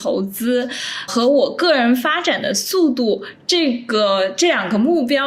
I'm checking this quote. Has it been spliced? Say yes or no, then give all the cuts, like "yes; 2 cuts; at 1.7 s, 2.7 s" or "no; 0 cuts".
yes; 1 cut; at 1.1 s